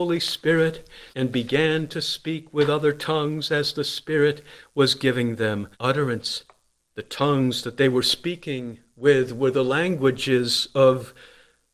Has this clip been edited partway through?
yes; 2 cuts; at 1.1 s, 5.7 s

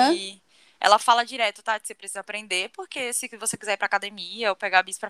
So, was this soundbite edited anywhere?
no; 0 cuts

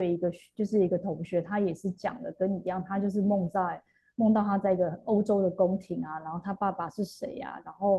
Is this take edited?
no; 0 cuts

